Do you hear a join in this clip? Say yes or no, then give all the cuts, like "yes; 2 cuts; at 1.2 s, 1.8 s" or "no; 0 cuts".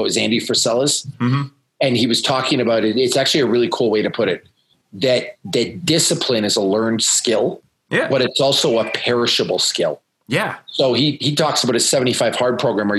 no; 0 cuts